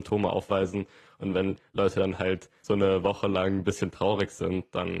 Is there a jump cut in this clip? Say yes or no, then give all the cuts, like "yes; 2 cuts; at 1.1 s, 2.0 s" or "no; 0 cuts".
no; 0 cuts